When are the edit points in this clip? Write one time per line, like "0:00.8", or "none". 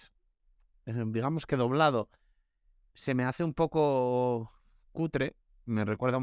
none